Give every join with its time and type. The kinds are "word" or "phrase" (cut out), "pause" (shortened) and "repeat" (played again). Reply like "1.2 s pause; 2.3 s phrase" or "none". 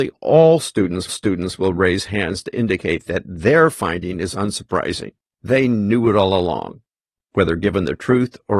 1.1 s repeat